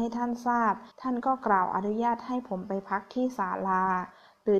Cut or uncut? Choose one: cut